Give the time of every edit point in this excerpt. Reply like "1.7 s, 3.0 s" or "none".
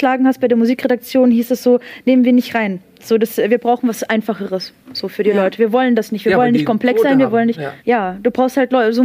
7.8 s

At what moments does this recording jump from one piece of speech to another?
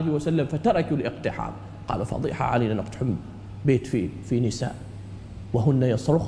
none

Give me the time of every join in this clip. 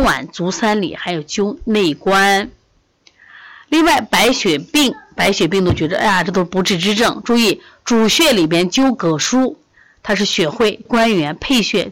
10.9 s

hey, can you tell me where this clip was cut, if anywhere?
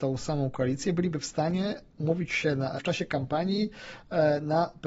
2.8 s

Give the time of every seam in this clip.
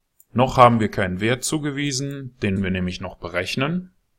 2.6 s

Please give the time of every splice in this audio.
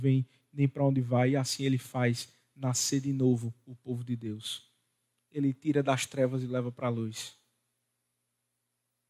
none

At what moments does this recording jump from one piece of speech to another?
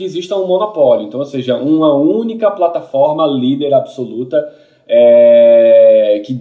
none

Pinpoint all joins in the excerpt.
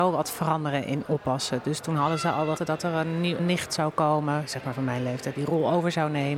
2.6 s, 3.4 s, 5.3 s

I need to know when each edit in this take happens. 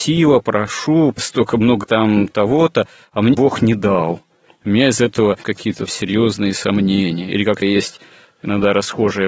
1.8 s, 2.3 s, 3.3 s, 5.4 s, 5.9 s, 7.6 s

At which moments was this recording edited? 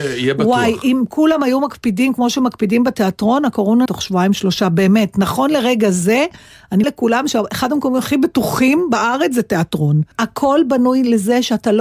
3.9 s, 6.8 s, 10.1 s

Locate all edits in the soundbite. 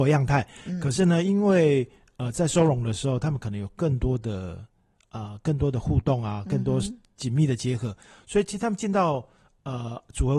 none

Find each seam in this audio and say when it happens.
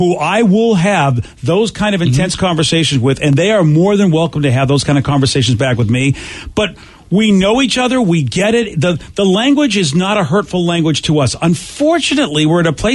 none

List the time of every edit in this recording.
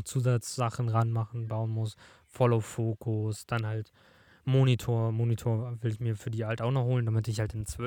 none

